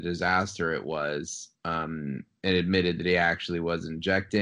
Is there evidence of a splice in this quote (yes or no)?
yes